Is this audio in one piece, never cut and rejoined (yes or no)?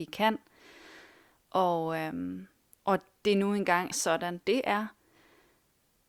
no